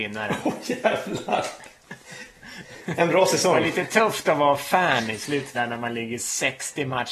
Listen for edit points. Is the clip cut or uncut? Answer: cut